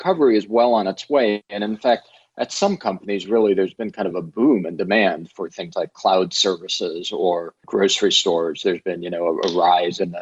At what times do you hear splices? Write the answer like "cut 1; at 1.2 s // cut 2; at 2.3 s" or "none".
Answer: none